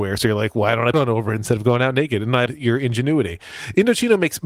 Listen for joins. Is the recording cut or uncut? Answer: cut